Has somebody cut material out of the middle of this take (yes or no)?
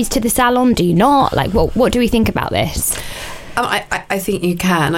no